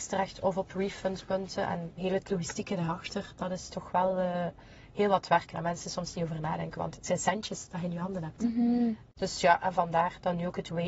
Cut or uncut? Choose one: uncut